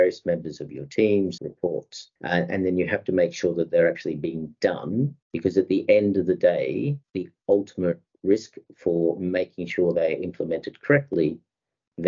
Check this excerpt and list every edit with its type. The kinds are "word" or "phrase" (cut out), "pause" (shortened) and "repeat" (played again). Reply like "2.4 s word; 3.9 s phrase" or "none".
1.4 s phrase; 2.2 s pause; 5.2 s pause; 7.0 s pause